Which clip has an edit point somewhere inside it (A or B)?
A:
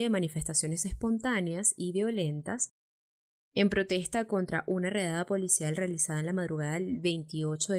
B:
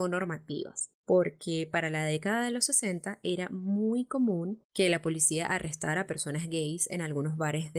B